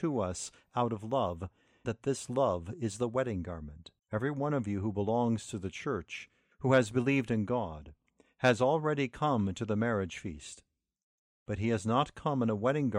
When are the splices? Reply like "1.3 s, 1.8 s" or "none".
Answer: 1.8 s, 4.0 s, 6.5 s